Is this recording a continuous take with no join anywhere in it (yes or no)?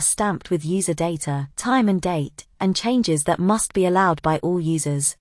no